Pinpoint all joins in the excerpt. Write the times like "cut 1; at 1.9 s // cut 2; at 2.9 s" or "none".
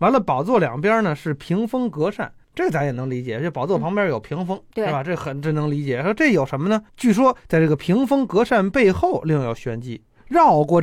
cut 1; at 4.7 s // cut 2; at 6.9 s